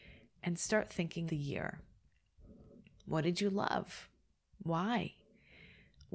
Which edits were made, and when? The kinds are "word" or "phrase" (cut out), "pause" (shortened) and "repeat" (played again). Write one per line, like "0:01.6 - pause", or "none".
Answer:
0:01.3 - word